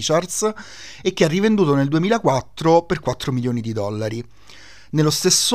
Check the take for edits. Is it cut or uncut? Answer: uncut